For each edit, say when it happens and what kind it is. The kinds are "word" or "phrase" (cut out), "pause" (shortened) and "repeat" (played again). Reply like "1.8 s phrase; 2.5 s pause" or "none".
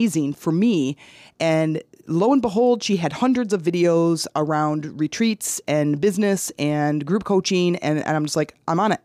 none

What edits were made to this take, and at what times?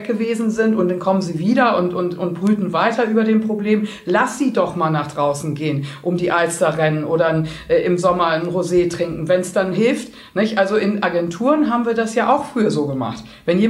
none

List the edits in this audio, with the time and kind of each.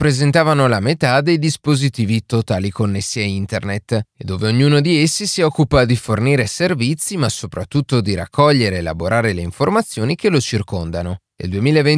none

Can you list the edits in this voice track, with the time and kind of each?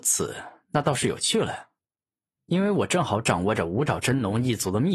none

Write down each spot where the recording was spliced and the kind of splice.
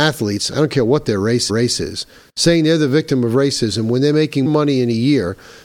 1.5 s repeat; 4.5 s word

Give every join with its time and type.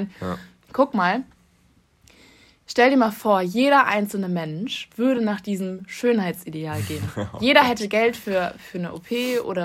none

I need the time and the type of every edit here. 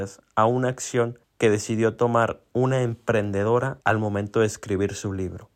1.2 s pause; 3.8 s pause

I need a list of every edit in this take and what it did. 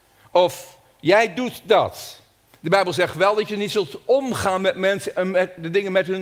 2.5 s pause

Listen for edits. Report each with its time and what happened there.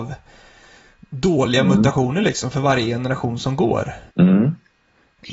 4.1 s pause

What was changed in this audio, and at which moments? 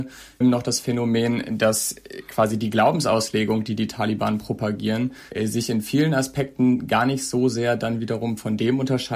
5.3 s pause

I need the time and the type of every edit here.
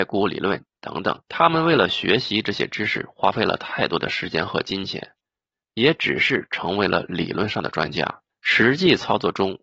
1.2 s pause; 5.6 s phrase; 8.3 s pause

